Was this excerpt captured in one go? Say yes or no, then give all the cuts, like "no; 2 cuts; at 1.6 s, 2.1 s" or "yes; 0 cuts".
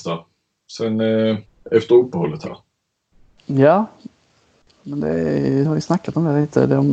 no; 2 cuts; at 1.5 s, 5.6 s